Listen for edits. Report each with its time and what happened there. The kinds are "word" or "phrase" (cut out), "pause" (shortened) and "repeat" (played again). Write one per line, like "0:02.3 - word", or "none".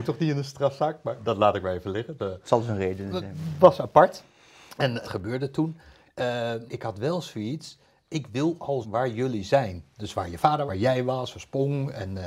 0:02.2 - word
0:05.0 - word
0:06.7 - word
0:08.8 - word
0:10.7 - word